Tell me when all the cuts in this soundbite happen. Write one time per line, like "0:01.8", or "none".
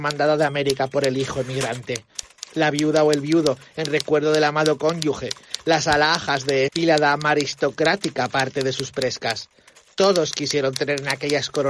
0:06.7